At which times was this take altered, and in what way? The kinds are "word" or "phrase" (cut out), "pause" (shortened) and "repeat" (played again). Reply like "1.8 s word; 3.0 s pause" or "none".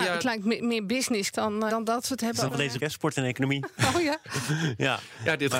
1.3 s word; 1.7 s word; 2.5 s word; 2.8 s word